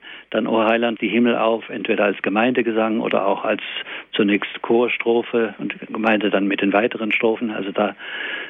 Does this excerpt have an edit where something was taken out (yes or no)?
yes